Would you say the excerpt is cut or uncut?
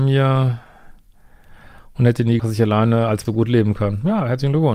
cut